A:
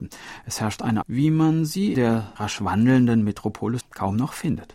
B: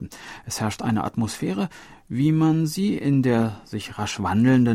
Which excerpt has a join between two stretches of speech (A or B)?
A